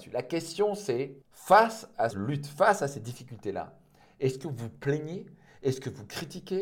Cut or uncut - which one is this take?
cut